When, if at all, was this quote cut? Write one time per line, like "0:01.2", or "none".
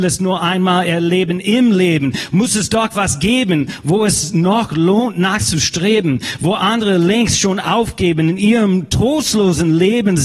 none